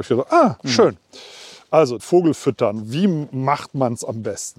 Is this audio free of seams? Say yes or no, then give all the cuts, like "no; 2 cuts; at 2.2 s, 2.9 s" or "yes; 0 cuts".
no; 1 cut; at 2.0 s